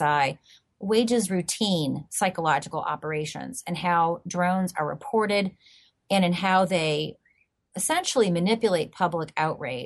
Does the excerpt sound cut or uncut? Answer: uncut